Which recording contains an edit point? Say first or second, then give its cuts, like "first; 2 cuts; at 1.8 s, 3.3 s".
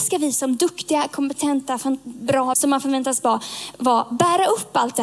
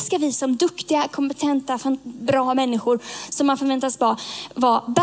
first; 1 cut; at 2.5 s